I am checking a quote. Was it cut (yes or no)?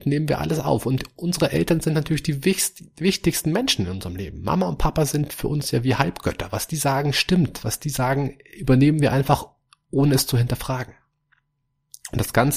no